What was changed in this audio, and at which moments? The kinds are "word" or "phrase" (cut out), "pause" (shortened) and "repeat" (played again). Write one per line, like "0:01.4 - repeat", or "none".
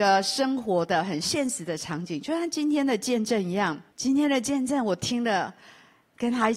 0:03.9 - pause